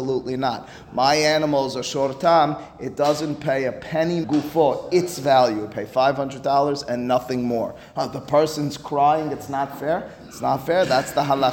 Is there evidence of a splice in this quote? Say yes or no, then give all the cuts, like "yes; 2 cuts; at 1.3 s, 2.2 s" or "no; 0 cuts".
yes; 1 cut; at 4.2 s